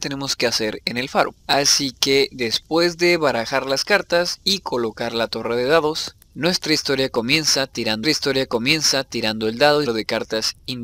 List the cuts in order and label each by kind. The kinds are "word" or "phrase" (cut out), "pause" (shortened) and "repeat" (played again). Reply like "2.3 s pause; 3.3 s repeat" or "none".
1.4 s pause; 8.0 s repeat; 9.9 s phrase